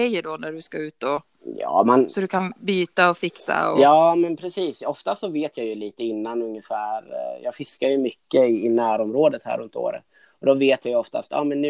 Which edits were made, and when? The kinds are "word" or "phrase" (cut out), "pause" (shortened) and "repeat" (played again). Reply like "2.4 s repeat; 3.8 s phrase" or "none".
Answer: none